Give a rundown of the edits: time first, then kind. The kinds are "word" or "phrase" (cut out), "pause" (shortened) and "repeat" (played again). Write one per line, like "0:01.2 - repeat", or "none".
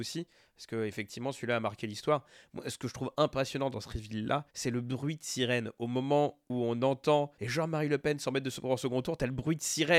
0:04.5 - pause
0:07.3 - pause